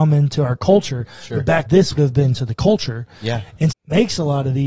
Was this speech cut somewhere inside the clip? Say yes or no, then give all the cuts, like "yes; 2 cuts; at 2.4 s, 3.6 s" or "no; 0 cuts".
yes; 4 cuts; at 1.7 s, 2.0 s, 2.4 s, 3.7 s